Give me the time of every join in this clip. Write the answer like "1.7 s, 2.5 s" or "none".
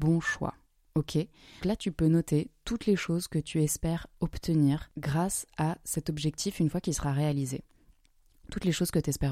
1.6 s